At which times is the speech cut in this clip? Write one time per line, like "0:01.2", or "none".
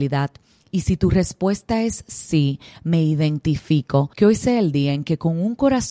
0:04.1

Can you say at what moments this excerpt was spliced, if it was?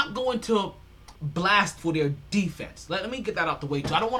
0:01.1
0:01.8

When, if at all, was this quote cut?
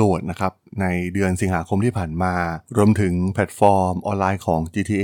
0:02.7

